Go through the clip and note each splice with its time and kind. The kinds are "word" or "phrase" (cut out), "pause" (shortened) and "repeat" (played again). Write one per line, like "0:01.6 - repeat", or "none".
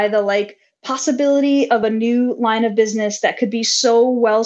none